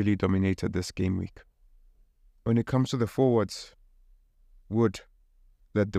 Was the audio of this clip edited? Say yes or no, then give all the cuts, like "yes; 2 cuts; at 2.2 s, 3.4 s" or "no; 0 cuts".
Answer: no; 0 cuts